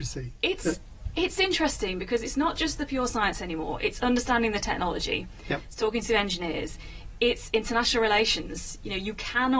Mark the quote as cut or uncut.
uncut